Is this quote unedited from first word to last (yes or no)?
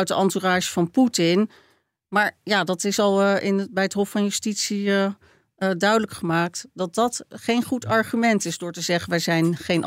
yes